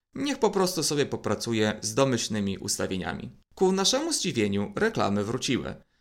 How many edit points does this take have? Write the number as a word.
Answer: one